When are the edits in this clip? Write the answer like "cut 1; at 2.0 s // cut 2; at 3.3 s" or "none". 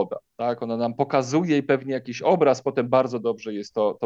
none